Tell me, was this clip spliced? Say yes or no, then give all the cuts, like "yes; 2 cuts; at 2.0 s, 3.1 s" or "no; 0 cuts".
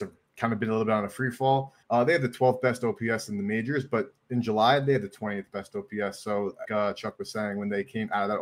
yes; 2 cuts; at 1.8 s, 6.6 s